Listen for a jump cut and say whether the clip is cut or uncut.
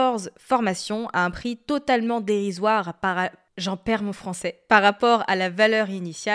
uncut